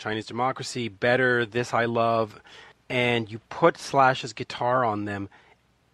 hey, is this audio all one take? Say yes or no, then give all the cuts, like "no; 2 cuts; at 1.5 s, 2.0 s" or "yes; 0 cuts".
no; 1 cut; at 2.7 s